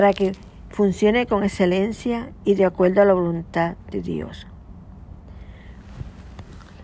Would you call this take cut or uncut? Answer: uncut